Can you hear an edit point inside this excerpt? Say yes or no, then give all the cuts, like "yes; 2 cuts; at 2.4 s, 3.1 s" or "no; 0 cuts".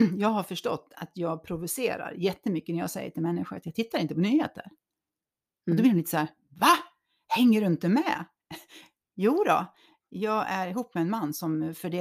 no; 0 cuts